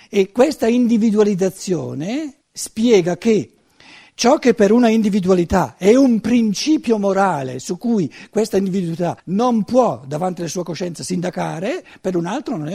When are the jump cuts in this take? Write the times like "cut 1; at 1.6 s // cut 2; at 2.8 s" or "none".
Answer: cut 1; at 2.4 s // cut 2; at 9.2 s